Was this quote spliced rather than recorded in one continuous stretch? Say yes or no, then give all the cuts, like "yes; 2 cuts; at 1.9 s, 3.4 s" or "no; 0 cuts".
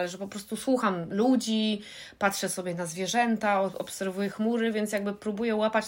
no; 0 cuts